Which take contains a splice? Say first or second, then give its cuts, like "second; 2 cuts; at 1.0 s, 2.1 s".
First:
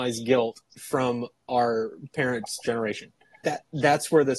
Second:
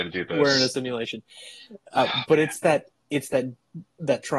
first; 1 cut; at 3.4 s